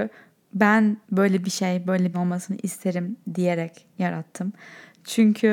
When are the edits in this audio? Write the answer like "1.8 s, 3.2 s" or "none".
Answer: 1.0 s, 2.1 s